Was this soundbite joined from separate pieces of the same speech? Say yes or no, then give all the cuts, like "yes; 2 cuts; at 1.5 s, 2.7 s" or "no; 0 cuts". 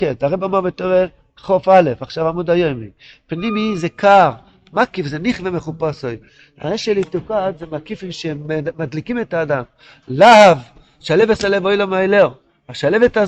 no; 0 cuts